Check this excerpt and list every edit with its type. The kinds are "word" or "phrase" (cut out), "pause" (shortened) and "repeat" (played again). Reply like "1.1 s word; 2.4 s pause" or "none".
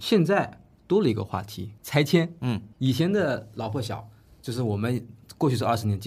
1.8 s pause; 2.7 s pause